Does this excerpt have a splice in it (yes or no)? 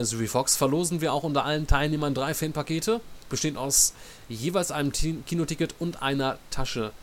no